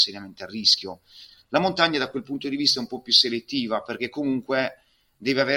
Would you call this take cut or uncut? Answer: uncut